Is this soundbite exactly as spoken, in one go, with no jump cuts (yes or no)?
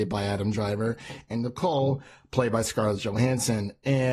yes